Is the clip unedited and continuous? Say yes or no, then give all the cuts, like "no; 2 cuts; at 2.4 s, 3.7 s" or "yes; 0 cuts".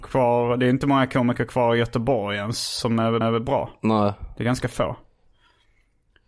no; 1 cut; at 3.2 s